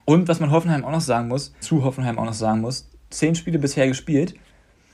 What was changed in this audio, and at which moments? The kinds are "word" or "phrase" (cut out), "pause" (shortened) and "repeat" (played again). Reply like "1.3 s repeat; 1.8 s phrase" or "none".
1.6 s phrase